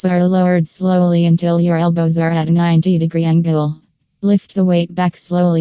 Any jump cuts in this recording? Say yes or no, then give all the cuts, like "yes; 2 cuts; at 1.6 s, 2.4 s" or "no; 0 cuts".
no; 0 cuts